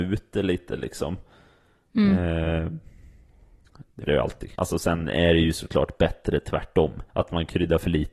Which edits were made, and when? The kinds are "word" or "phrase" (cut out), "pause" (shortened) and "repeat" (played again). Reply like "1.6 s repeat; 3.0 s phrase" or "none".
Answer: 4.1 s word; 4.5 s pause; 7.1 s pause